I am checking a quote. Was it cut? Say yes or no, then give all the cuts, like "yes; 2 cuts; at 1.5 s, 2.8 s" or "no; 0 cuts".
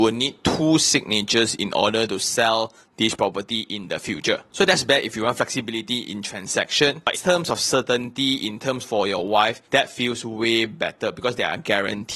yes; 3 cuts; at 7.1 s, 8.8 s, 9.6 s